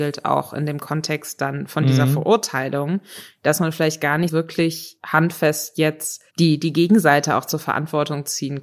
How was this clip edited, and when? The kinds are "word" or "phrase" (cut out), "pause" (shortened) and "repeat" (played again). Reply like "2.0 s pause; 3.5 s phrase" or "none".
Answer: 4.3 s word; 6.3 s pause